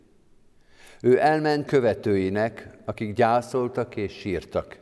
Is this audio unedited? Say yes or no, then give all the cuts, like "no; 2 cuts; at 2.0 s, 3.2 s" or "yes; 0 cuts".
no; 1 cut; at 1.7 s